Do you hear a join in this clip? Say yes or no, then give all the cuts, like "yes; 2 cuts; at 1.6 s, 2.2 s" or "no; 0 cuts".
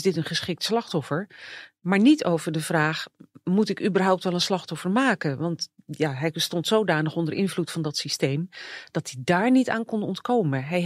no; 0 cuts